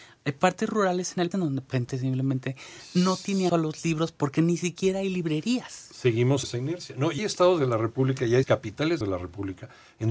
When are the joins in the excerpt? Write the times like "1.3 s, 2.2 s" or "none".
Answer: 1.3 s, 1.7 s, 3.5 s, 6.4 s, 7.2 s, 8.4 s, 9.0 s